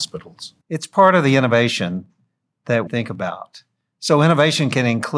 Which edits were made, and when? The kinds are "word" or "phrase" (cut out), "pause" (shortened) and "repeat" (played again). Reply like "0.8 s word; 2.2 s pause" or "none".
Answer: 2.9 s word